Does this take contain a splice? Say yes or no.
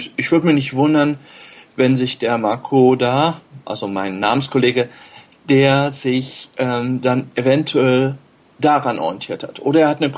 no